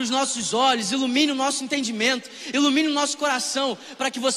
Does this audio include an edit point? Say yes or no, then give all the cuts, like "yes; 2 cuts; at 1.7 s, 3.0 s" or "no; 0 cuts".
no; 0 cuts